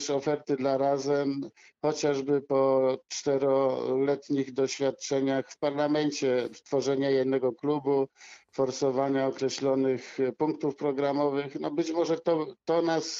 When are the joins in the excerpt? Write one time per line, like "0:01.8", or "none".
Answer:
none